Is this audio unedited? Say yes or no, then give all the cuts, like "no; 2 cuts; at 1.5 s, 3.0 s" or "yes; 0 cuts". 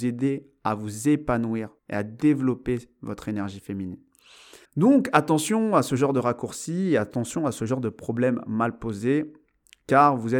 no; 2 cuts; at 1.8 s, 4.6 s